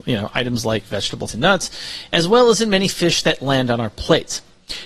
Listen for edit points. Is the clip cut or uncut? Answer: cut